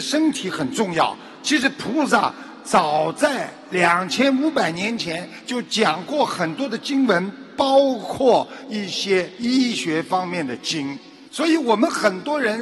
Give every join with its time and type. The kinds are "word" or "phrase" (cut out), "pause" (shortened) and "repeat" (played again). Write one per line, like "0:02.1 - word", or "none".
0:11.3 - pause

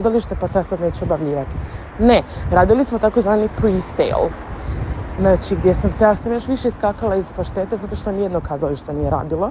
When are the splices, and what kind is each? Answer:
0:06.2 - phrase

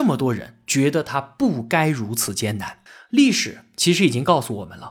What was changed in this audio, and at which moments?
0:02.9 - pause

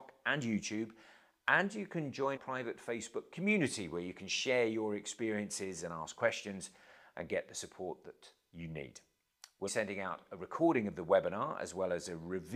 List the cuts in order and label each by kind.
0:02.4 - word
0:09.7 - phrase

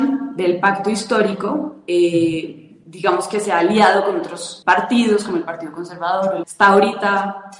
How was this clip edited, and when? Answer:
0:04.6 - word
0:06.4 - word

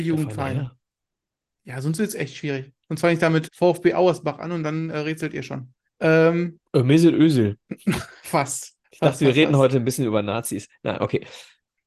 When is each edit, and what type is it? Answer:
0:03.5 - word
0:05.9 - pause
0:07.6 - pause
0:08.8 - pause

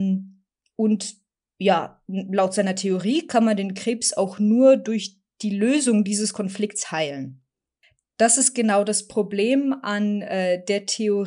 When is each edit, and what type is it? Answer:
none

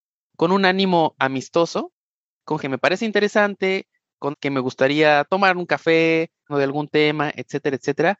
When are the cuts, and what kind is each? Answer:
0:02.6 - word
0:04.3 - word
0:06.5 - phrase

